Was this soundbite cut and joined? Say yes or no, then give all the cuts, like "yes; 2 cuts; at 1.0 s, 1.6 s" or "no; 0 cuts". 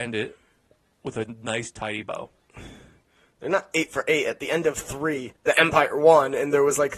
yes; 1 cut; at 5.4 s